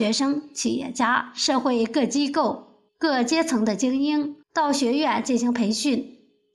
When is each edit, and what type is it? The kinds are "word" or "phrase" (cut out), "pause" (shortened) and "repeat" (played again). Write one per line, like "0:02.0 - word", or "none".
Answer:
0:02.9 - pause
0:04.4 - pause